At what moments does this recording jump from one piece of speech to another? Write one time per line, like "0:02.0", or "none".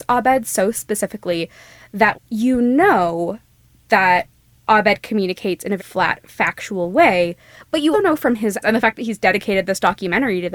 0:02.1
0:05.8
0:07.9
0:08.6